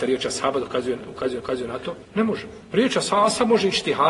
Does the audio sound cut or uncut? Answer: cut